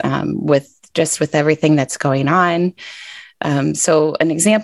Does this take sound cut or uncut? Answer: uncut